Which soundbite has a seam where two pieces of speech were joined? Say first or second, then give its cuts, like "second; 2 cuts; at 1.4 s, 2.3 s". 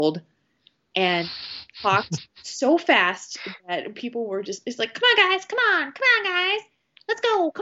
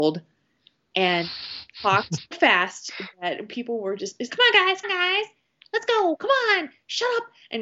second; 3 cuts; at 2.3 s, 4.3 s, 4.8 s